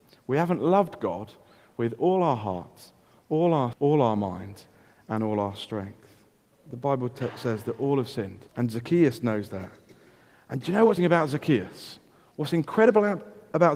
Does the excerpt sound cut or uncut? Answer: cut